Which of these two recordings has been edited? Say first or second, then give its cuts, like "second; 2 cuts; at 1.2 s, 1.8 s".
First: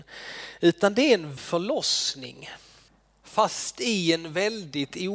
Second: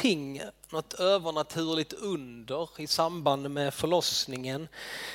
first; 1 cut; at 1.4 s